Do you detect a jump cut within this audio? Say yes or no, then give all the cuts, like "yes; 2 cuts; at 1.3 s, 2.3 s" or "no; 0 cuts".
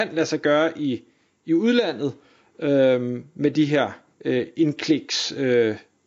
no; 0 cuts